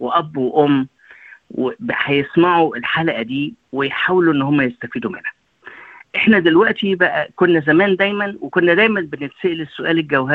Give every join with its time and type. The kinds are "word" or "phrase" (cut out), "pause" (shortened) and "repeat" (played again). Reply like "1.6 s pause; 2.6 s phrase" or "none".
none